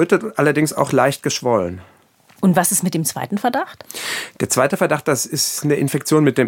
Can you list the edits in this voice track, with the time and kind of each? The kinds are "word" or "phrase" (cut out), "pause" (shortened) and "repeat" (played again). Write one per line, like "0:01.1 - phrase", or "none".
none